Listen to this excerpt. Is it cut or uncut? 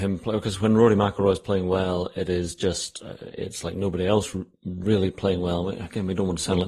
uncut